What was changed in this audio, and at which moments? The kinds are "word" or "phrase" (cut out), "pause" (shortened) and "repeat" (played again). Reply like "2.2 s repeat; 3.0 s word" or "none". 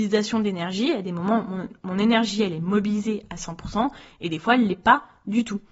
none